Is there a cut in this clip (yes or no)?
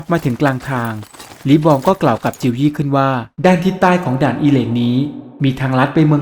yes